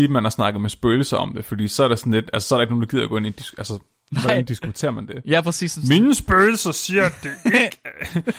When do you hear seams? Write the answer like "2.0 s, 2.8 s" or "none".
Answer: none